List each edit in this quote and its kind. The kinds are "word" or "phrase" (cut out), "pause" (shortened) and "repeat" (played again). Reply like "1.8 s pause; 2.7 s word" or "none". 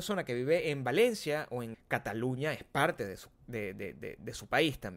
1.7 s word